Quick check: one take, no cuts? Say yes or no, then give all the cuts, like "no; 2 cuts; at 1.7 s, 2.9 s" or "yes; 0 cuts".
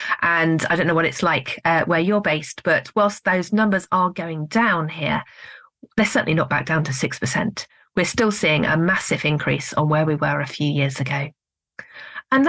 yes; 0 cuts